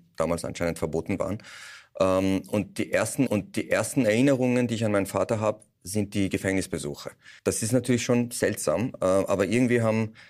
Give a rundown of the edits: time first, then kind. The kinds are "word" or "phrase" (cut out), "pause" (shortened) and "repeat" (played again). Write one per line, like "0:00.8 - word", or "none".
0:03.3 - repeat
0:07.4 - pause